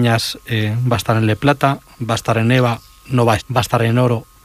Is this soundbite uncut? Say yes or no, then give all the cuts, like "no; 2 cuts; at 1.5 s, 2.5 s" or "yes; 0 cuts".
no; 1 cut; at 3.4 s